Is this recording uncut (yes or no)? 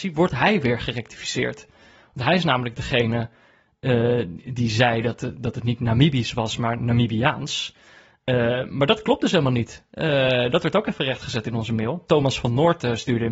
yes